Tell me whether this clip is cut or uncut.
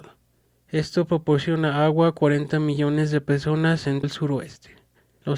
cut